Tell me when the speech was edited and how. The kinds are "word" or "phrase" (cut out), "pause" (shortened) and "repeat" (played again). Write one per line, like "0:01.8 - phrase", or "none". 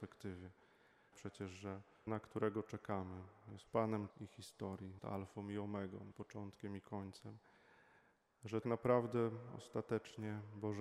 0:01.1 - word
0:02.1 - word
0:03.7 - word
0:04.1 - word
0:05.0 - word
0:06.1 - word
0:08.6 - word